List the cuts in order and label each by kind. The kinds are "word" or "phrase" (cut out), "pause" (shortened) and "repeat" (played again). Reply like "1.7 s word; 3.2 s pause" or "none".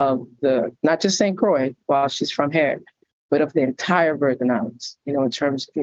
none